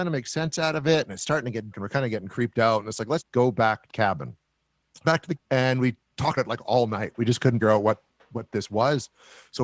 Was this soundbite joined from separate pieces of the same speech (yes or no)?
yes